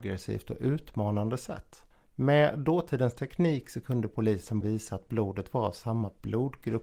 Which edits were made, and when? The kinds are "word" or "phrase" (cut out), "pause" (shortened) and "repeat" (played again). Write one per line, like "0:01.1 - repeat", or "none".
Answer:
0:04.6 - word